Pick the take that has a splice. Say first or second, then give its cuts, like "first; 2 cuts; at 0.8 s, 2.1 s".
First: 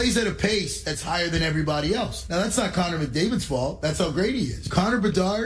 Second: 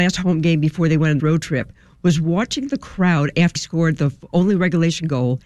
second; 2 cuts; at 1.2 s, 3.6 s